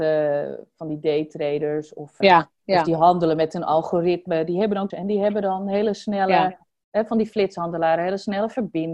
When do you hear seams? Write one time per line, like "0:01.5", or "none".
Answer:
0:02.2
0:02.5
0:04.9